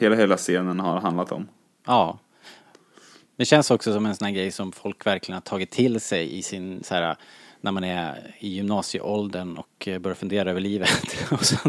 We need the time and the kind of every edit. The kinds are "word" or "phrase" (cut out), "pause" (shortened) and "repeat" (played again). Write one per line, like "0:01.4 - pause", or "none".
none